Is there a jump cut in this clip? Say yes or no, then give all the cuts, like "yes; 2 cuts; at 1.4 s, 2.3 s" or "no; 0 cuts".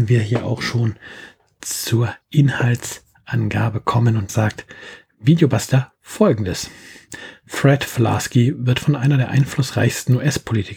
yes; 2 cuts; at 2.2 s, 4.3 s